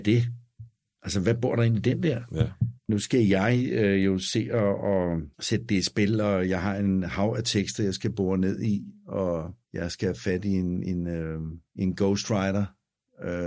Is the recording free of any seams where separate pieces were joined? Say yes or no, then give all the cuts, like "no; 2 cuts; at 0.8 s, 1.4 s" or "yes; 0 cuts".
no; 4 cuts; at 2.8 s, 5.3 s, 9.6 s, 11.7 s